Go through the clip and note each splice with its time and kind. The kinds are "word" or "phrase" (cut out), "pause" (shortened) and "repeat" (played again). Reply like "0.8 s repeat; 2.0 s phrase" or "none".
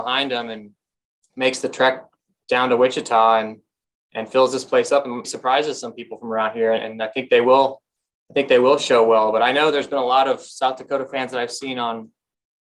5.2 s word